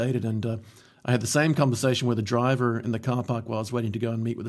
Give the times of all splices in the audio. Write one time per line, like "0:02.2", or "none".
none